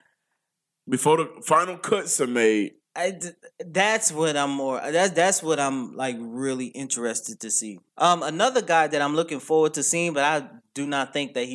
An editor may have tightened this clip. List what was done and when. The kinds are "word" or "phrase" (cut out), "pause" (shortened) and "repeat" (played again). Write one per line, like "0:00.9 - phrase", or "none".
0:02.8 - pause
0:07.9 - pause